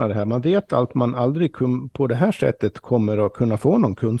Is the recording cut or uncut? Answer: uncut